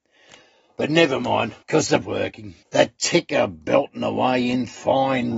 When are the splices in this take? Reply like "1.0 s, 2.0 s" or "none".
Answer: 1.6 s, 2.0 s, 2.6 s